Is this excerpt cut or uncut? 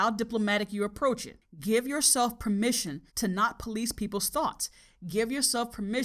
cut